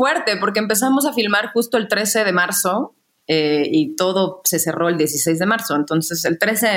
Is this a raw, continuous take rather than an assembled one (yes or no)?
yes